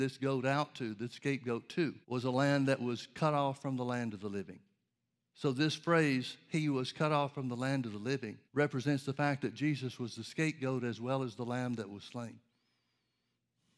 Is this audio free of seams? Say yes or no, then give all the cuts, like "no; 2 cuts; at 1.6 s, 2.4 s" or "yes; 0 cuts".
no; 3 cuts; at 2.0 s, 4.9 s, 8.5 s